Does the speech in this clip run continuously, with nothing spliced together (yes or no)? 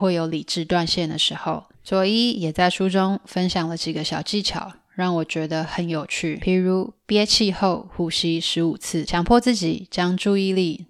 no